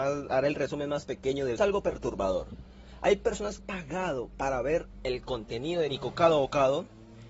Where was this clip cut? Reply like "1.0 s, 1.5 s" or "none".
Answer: 1.6 s, 3.6 s